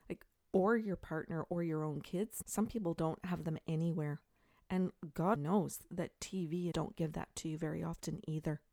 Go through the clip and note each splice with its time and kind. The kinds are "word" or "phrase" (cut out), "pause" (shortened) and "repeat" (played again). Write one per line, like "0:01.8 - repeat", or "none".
0:02.4 - word
0:05.4 - word
0:06.7 - word